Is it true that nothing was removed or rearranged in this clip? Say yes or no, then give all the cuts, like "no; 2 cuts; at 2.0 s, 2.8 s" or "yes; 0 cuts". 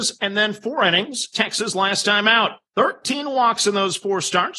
no; 2 cuts; at 1.3 s, 2.7 s